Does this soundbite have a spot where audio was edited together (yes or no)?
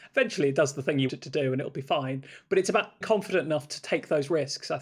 yes